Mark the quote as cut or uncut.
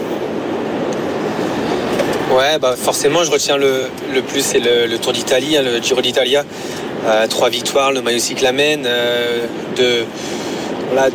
uncut